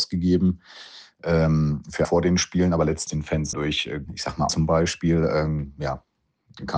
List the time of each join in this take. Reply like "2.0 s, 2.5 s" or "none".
2.0 s, 3.1 s, 3.5 s, 4.1 s, 4.5 s